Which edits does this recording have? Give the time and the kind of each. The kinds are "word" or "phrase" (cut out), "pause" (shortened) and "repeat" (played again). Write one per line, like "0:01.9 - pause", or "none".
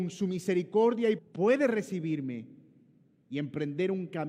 0:01.2 - word